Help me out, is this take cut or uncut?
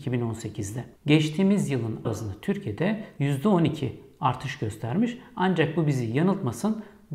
cut